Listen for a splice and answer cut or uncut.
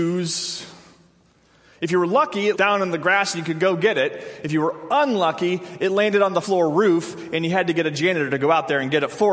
cut